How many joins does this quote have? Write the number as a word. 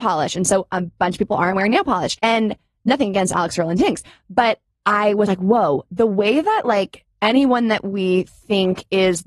two